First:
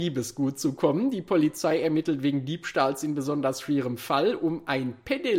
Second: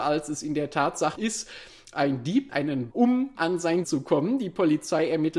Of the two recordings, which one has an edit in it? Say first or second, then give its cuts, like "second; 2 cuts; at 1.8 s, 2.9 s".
second; 5 cuts; at 1.1 s, 2.5 s, 2.9 s, 3.3 s, 3.8 s